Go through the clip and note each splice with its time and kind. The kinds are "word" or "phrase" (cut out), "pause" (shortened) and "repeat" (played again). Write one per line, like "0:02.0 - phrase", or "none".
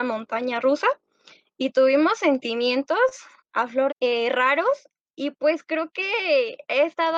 0:03.4 - pause
0:03.9 - phrase